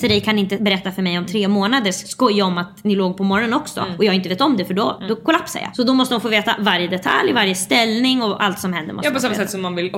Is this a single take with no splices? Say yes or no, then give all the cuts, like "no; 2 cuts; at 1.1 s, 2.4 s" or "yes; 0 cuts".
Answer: yes; 0 cuts